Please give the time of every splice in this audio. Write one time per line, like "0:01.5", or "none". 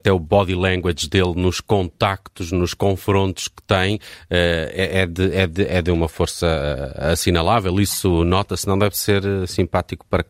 none